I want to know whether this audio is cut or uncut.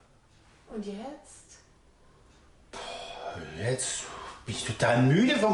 uncut